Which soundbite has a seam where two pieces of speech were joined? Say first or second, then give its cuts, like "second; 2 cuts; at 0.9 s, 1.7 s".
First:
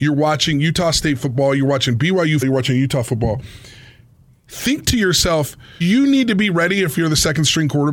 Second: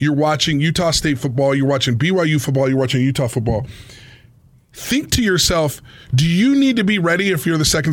first; 2 cuts; at 2.4 s, 5.8 s